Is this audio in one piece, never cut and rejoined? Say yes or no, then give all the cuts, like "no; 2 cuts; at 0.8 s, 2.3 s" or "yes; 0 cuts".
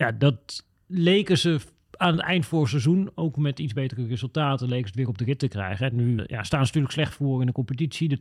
no; 1 cut; at 6.2 s